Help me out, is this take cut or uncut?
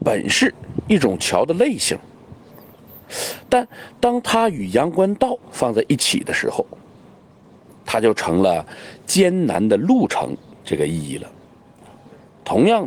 cut